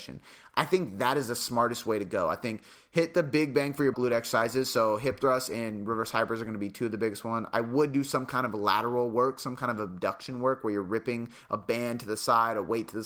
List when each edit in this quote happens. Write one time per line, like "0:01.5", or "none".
0:03.9